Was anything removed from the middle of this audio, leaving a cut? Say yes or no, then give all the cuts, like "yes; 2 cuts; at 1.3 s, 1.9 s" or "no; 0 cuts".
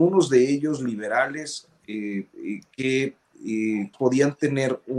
yes; 1 cut; at 3.9 s